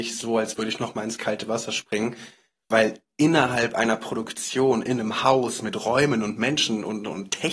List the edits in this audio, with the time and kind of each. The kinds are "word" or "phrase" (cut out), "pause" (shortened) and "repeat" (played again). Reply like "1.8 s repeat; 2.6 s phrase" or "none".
none

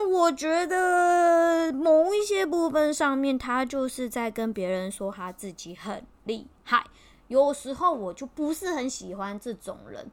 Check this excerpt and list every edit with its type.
none

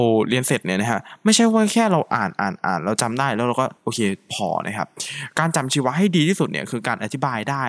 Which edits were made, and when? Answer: 3.8 s pause

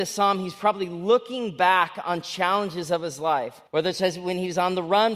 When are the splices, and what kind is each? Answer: 3.7 s pause

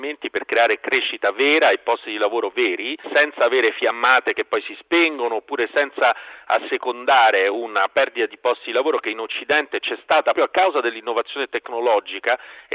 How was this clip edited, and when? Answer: 10.3 s word

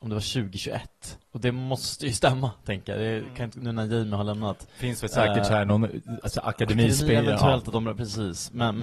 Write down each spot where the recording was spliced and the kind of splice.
1.2 s pause

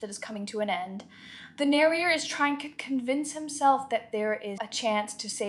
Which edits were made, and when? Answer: 4.6 s word

